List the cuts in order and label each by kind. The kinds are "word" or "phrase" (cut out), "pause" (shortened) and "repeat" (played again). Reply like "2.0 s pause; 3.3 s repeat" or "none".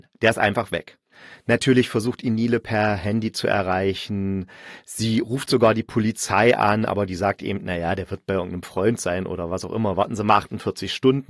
none